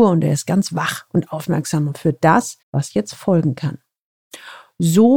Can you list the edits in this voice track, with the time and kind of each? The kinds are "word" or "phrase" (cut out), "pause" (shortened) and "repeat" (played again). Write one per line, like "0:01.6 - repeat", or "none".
0:02.6 - pause